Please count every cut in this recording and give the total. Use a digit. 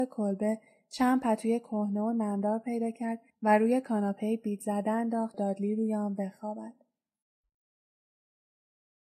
2